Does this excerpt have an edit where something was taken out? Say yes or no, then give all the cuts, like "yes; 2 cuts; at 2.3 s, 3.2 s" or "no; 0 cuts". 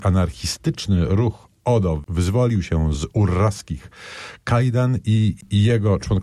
no; 0 cuts